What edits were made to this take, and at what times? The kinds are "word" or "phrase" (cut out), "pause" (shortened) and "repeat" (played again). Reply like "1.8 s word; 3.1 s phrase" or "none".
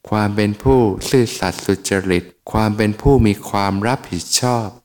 2.4 s pause